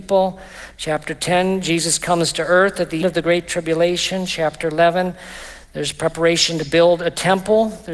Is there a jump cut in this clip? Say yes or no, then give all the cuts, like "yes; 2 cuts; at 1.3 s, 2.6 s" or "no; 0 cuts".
yes; 1 cut; at 3.0 s